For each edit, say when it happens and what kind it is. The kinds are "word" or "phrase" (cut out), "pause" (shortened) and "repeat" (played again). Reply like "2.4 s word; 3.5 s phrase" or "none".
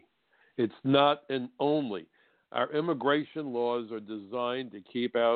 none